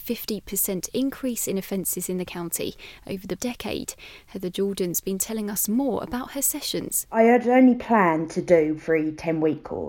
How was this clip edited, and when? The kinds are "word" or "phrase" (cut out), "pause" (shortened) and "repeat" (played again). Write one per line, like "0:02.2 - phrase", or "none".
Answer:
0:03.4 - word
0:08.8 - word

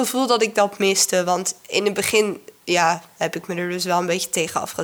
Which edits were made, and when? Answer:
none

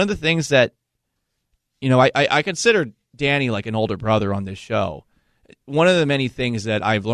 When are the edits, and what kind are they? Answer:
none

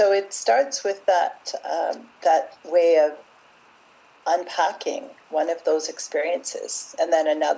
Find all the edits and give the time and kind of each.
none

